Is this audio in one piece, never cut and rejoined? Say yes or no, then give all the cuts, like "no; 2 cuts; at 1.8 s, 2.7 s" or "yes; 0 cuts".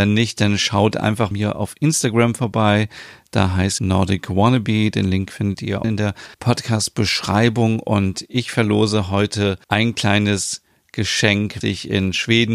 no; 6 cuts; at 1.3 s, 3.8 s, 5.8 s, 6.3 s, 9.6 s, 11.6 s